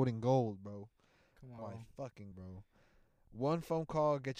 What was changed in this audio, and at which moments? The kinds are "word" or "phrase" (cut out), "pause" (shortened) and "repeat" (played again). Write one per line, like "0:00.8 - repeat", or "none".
0:01.6 - word
0:02.3 - word